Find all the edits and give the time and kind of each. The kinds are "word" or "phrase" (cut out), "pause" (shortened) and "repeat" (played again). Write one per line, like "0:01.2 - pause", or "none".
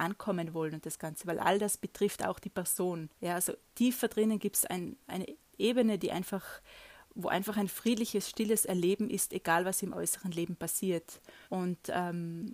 0:03.1 - pause
0:11.4 - pause